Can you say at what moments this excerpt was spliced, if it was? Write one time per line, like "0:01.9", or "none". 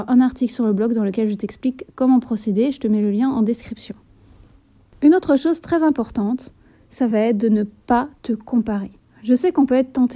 none